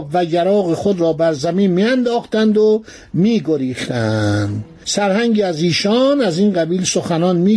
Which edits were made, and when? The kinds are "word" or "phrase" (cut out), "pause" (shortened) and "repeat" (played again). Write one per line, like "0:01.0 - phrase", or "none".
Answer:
none